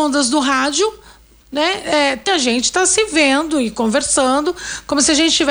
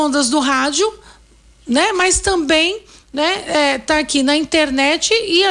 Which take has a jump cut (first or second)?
first